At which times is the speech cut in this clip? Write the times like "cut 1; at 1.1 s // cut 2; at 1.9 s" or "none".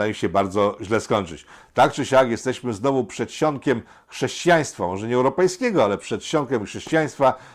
none